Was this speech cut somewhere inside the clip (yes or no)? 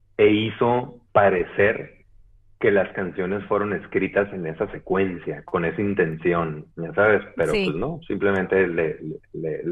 yes